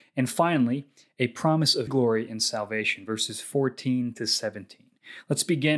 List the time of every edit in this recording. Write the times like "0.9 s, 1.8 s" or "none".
1.9 s